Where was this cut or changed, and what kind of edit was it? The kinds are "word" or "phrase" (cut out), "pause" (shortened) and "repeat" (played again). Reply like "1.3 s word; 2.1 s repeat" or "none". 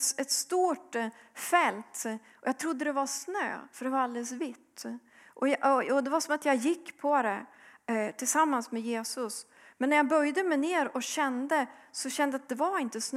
none